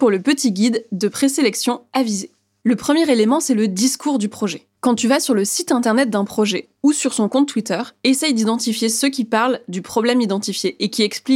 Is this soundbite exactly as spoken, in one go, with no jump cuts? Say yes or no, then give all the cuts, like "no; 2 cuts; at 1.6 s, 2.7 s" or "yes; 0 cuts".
yes; 0 cuts